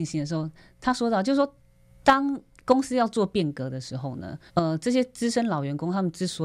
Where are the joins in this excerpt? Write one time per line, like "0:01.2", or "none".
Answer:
0:04.5